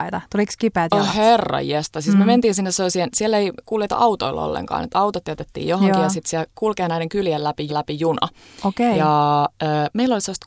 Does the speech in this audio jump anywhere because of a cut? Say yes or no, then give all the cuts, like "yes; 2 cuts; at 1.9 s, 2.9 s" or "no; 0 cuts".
yes; 1 cut; at 7.7 s